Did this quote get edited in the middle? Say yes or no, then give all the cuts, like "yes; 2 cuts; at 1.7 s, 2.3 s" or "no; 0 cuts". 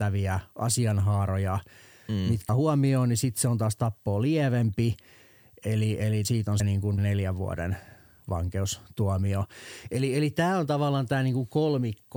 yes; 4 cuts; at 2.5 s, 6.2 s, 6.6 s, 7.0 s